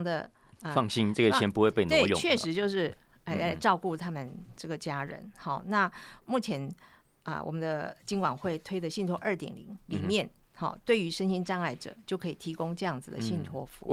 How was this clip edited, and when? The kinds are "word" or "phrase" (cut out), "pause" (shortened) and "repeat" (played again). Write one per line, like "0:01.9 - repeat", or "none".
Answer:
none